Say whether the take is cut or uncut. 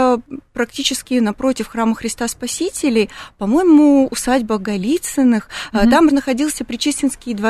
cut